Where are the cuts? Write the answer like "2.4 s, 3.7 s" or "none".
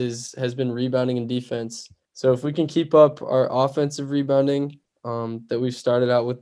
2.0 s, 4.9 s